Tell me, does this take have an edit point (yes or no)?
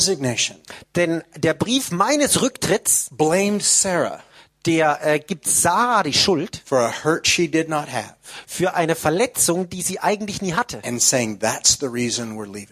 no